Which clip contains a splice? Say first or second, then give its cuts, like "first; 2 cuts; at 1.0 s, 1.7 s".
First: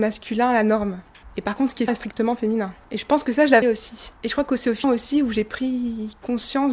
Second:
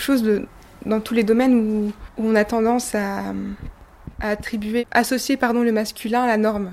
first; 3 cuts; at 1.9 s, 3.6 s, 4.8 s